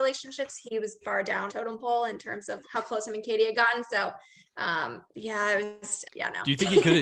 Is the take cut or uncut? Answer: cut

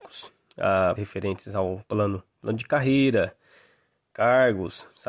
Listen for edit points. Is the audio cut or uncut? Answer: cut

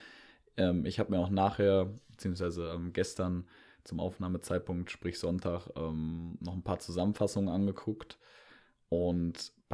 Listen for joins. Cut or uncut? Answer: uncut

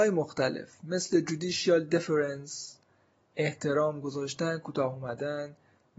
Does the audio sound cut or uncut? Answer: uncut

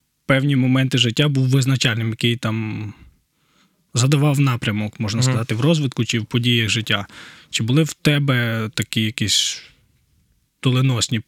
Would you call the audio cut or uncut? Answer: uncut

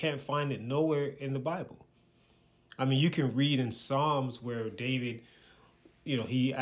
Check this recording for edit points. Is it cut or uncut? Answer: uncut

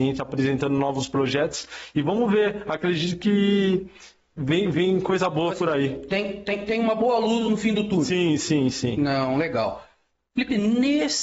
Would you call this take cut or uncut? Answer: uncut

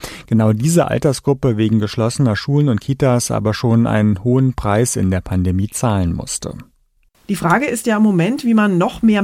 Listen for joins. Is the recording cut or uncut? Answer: uncut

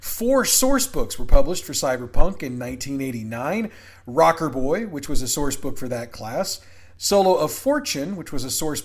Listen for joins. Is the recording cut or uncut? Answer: uncut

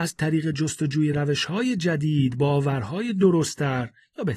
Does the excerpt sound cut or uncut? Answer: uncut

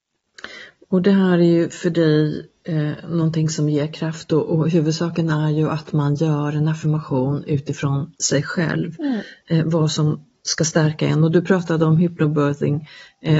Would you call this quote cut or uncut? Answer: uncut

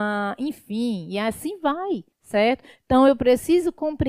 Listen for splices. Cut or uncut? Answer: cut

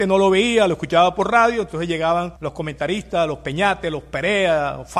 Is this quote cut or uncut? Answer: cut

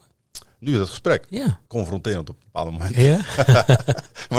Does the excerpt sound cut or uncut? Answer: cut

